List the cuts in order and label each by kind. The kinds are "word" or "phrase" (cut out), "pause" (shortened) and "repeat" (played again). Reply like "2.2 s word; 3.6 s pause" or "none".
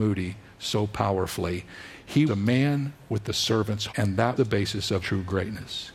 2.3 s word; 3.9 s word; 4.4 s word; 5.0 s word